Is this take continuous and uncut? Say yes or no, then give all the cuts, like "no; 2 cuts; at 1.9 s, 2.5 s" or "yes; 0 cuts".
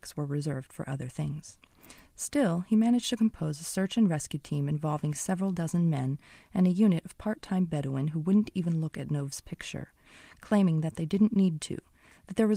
yes; 0 cuts